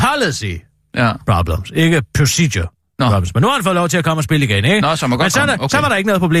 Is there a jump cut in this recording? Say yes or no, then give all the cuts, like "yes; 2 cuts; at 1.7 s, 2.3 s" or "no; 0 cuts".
no; 0 cuts